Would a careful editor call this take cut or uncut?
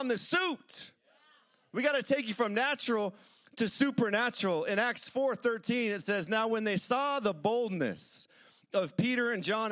uncut